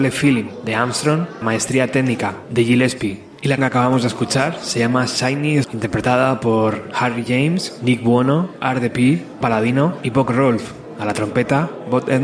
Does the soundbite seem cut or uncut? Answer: cut